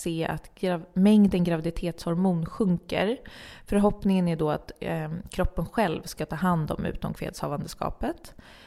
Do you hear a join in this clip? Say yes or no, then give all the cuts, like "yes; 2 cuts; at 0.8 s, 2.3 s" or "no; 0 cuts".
no; 0 cuts